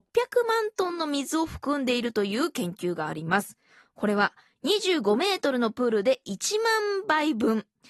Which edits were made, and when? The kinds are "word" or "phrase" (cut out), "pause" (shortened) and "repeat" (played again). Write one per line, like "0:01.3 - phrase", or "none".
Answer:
none